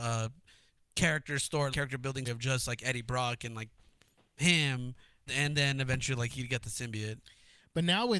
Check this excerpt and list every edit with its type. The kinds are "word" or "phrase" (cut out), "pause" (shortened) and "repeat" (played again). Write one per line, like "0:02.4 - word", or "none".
0:01.7 - word
0:02.2 - word
0:05.3 - word